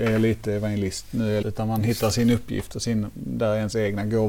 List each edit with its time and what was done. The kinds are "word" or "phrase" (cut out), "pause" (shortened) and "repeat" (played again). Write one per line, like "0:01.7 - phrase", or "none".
0:01.4 - word